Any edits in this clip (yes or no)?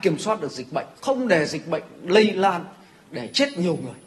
yes